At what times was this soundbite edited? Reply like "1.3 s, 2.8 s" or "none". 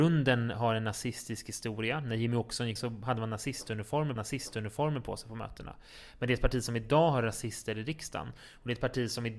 2.8 s, 4.2 s